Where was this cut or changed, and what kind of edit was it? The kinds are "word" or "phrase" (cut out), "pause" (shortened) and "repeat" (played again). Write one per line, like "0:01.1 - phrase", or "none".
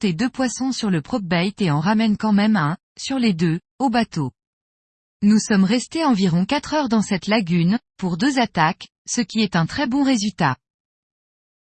none